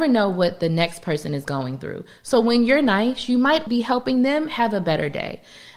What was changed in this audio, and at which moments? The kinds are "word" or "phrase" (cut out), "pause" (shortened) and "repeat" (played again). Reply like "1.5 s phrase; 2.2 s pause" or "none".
3.7 s word